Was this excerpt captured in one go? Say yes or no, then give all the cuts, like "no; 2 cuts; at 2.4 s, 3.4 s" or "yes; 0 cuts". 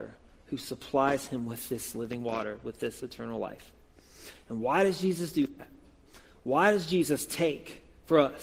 yes; 0 cuts